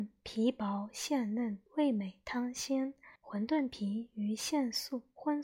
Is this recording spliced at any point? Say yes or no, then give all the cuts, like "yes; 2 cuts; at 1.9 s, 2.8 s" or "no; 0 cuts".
yes; 2 cuts; at 1.7 s, 3.2 s